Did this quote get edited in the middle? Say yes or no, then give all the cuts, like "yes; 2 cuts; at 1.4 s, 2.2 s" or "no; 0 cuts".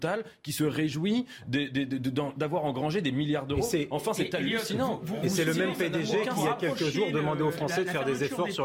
no; 0 cuts